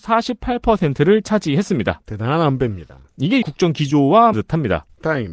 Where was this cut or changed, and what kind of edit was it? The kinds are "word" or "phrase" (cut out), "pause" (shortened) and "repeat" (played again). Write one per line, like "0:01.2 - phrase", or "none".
0:03.4 - phrase
0:04.3 - word